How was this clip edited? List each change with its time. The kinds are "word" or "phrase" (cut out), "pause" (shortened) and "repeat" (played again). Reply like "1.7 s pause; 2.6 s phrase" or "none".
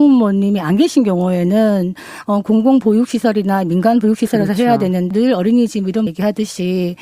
5.1 s word; 6.1 s word